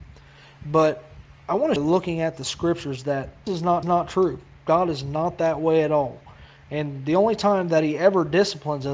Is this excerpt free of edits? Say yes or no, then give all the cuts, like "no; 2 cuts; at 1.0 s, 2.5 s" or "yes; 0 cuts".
no; 3 cuts; at 1.8 s, 3.5 s, 3.8 s